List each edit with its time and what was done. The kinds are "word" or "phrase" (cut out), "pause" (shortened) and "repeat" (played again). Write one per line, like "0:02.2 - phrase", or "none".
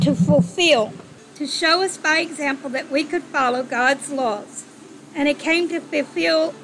none